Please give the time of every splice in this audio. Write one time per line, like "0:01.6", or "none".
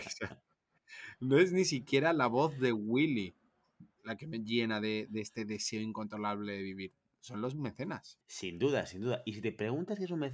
0:03.9